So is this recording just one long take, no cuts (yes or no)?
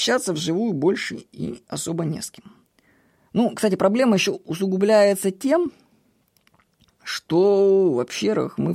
yes